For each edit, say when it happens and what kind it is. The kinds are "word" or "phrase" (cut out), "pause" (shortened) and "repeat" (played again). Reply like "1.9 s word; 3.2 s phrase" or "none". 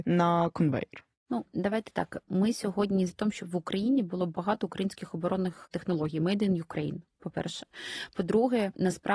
3.1 s word